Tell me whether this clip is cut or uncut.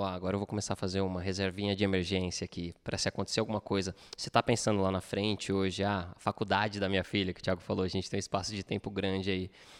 uncut